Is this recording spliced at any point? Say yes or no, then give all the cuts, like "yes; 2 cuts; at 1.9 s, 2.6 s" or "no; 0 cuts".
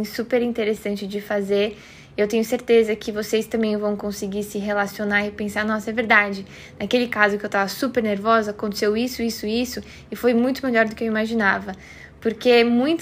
no; 0 cuts